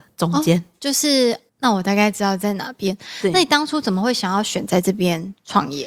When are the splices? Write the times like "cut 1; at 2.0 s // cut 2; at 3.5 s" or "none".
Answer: cut 1; at 1.5 s